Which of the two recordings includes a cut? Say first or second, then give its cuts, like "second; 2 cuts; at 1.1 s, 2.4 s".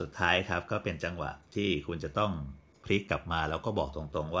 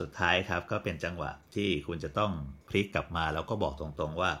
second; 1 cut; at 2.6 s